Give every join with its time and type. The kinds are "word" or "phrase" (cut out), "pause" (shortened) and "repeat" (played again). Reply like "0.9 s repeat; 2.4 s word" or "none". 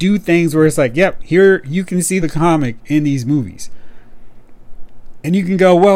2.2 s phrase